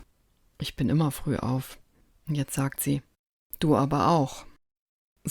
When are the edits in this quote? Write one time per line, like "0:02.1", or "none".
none